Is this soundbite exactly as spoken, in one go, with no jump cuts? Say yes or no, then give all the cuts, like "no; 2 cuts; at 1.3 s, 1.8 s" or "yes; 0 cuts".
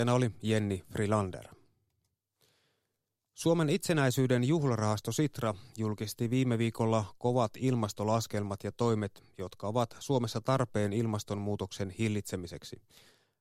yes; 0 cuts